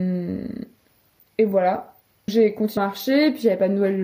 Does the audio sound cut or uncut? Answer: cut